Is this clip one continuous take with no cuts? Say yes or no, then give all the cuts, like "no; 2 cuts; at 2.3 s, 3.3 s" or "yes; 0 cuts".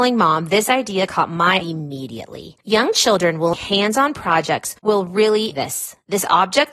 no; 5 cuts; at 1.6 s, 2.6 s, 3.5 s, 4.8 s, 5.5 s